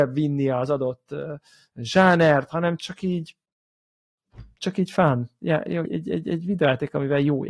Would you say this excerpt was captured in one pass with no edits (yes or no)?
no